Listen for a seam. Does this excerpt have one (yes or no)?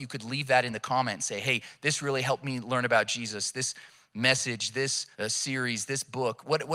yes